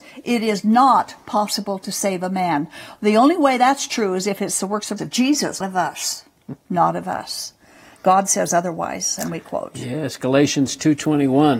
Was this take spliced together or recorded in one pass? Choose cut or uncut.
cut